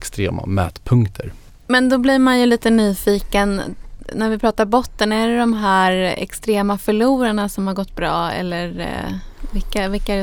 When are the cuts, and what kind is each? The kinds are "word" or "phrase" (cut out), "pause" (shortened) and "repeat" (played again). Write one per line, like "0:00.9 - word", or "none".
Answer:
none